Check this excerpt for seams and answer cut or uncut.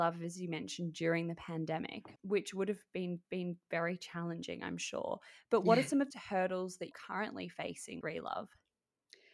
cut